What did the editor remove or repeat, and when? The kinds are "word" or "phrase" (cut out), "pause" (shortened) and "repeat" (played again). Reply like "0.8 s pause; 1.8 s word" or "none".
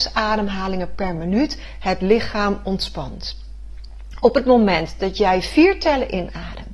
none